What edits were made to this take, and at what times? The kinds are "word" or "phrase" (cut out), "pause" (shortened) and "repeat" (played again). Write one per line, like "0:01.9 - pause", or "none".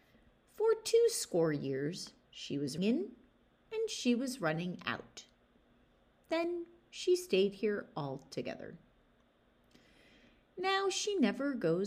0:02.8 - word